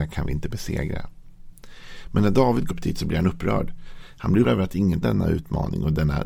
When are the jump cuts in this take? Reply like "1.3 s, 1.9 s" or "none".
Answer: 2.7 s, 4.4 s, 5.0 s